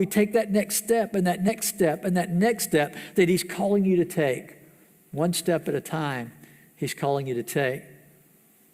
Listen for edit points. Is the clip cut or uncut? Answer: uncut